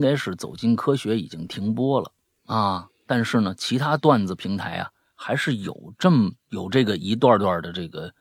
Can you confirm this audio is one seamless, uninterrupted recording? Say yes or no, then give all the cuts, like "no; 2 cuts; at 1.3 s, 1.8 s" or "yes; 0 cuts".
yes; 0 cuts